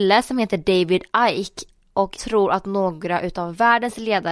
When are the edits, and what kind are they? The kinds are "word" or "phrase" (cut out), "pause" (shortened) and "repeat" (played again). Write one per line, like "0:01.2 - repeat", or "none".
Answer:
0:02.2 - word